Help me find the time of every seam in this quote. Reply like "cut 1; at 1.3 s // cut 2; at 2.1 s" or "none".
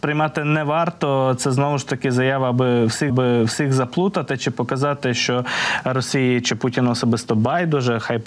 cut 1; at 3.1 s